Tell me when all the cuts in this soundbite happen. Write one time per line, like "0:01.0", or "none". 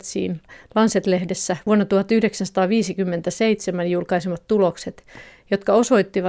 none

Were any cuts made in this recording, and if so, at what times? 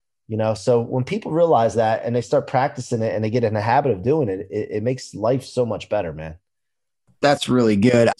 none

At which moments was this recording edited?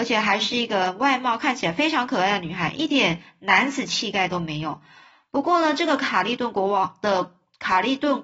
none

